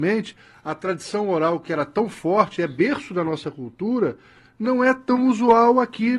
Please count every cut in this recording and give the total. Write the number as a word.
zero